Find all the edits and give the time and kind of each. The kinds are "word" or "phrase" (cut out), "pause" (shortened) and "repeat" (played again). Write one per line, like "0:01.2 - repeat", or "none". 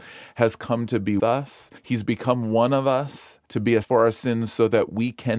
0:01.2 - word
0:01.8 - pause
0:03.4 - pause
0:03.8 - word